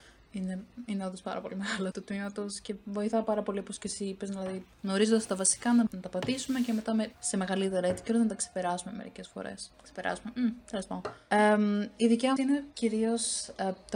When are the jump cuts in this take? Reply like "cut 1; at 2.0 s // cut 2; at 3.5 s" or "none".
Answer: cut 1; at 1.9 s // cut 2; at 4.7 s // cut 3; at 5.9 s // cut 4; at 7.2 s // cut 5; at 9.7 s // cut 6; at 12.4 s